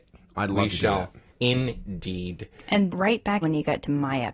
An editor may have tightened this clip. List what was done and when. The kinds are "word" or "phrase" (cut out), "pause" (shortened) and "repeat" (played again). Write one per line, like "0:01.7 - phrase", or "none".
0:01.3 - pause
0:02.9 - word
0:03.4 - word